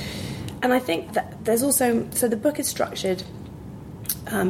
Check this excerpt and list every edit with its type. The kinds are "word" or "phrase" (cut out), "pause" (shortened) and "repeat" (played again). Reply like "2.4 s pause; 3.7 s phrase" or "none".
1.1 s word